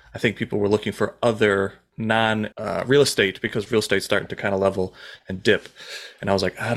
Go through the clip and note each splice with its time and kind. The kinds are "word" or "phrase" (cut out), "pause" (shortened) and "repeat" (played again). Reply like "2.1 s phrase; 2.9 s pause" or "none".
2.5 s pause